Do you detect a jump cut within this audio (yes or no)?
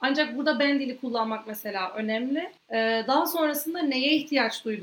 yes